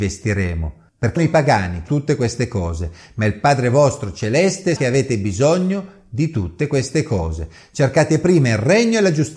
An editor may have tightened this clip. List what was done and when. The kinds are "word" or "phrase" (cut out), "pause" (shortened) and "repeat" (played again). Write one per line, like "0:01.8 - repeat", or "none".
0:01.2 - word
0:01.9 - word
0:04.8 - word